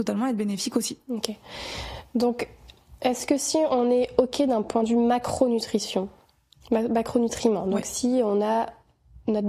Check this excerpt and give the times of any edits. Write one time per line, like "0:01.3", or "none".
none